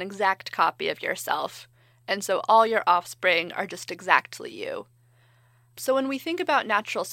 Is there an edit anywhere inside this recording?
no; 0 cuts

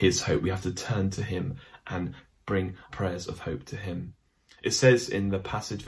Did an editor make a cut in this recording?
yes; 1 cut; at 2.9 s

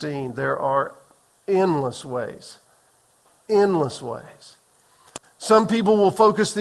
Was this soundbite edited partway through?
no; 0 cuts

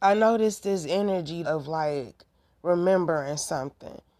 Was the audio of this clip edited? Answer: yes; 1 cut; at 1.4 s

